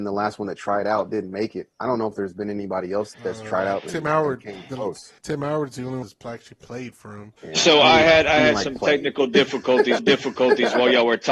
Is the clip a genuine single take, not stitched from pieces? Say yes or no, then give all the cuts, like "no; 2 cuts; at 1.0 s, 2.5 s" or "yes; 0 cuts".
no; 5 cuts; at 3.1 s, 5.2 s, 6.0 s, 7.4 s, 10.0 s